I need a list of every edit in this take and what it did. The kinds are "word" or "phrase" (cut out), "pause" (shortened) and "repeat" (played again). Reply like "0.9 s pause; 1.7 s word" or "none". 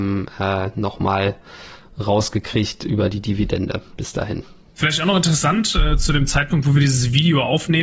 none